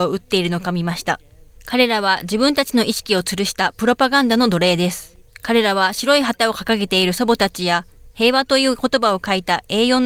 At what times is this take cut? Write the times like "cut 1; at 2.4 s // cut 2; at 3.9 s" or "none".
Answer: none

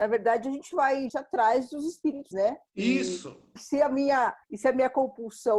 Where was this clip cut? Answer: cut 1; at 1.1 s // cut 2; at 2.3 s // cut 3; at 2.7 s // cut 4; at 4.4 s

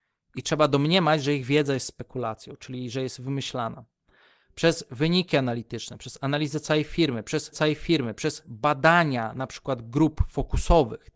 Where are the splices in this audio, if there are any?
cut 1; at 7.5 s

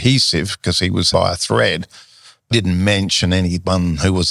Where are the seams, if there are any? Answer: cut 1; at 1.1 s // cut 2; at 2.5 s

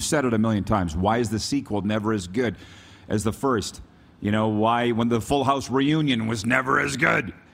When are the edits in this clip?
none

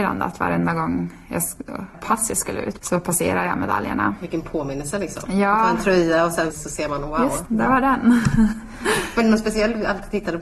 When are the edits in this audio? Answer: cut 1; at 1.9 s // cut 2; at 2.8 s // cut 3; at 6.5 s // cut 4; at 7.4 s

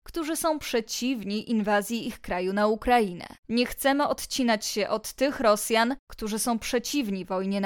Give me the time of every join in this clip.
cut 1; at 3.4 s

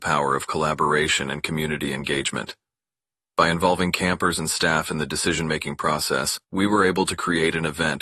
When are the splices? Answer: cut 1; at 6.4 s

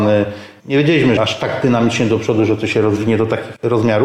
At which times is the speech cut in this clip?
cut 1; at 1.2 s

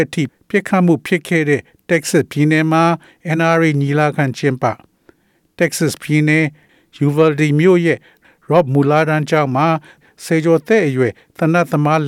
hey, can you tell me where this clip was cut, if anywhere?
none

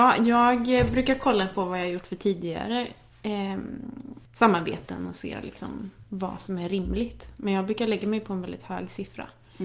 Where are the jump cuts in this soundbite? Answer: cut 1; at 4.2 s

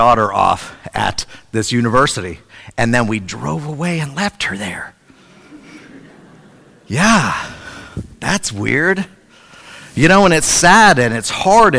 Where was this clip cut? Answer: none

